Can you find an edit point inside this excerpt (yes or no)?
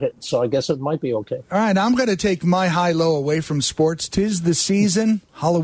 no